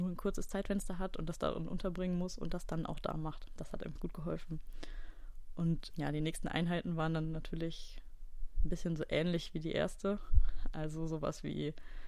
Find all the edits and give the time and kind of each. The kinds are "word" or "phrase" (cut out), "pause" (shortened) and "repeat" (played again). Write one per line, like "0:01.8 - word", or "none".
0:04.0 - word
0:05.9 - word